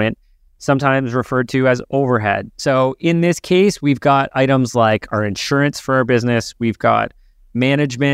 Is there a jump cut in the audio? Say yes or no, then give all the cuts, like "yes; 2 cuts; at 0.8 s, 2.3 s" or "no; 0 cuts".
no; 0 cuts